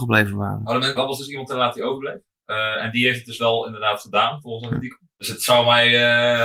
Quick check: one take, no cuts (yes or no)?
no